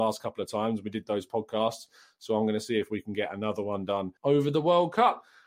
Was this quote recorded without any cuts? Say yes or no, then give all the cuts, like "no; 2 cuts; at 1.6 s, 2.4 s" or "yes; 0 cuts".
no; 1 cut; at 4.2 s